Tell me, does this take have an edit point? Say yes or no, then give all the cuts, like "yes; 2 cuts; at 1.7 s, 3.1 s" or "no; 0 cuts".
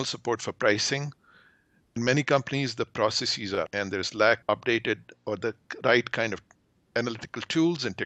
yes; 3 cuts; at 2.0 s, 3.7 s, 4.4 s